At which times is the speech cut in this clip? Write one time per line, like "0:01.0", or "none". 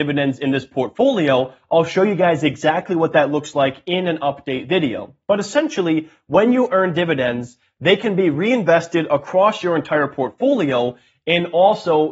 none